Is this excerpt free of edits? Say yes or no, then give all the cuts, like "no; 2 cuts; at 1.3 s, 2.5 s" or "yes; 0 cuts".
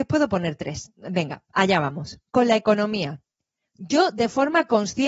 no; 1 cut; at 2.3 s